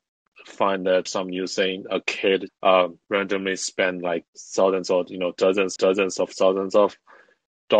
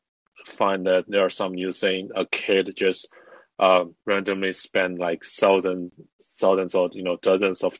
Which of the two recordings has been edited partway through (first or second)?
first